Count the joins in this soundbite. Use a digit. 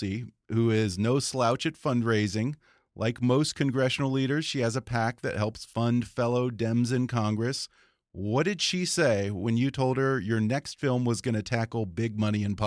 0